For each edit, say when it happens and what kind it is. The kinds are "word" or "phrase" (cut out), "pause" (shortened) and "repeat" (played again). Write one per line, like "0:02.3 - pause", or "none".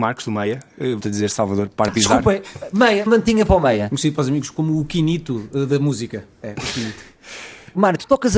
0:01.0 - word
0:01.9 - word
0:03.1 - phrase